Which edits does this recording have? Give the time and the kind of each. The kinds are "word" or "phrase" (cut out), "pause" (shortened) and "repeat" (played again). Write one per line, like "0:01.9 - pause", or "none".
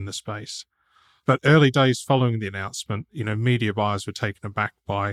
none